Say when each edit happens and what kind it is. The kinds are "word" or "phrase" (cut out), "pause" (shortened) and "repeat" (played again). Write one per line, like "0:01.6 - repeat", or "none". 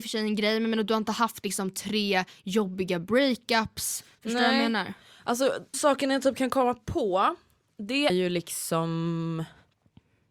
0:05.7 - word
0:08.1 - word

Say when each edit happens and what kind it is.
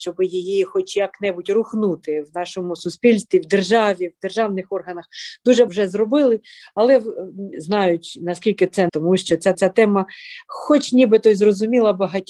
0:05.7 - word
0:07.5 - phrase
0:08.9 - word
0:09.5 - repeat

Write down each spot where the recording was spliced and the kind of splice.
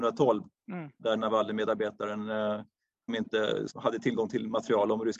0:03.1 - word
0:03.7 - word

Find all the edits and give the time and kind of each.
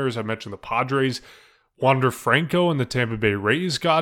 none

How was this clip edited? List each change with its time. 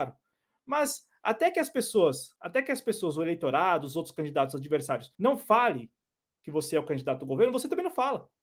0:02.4 - pause
0:05.1 - pause

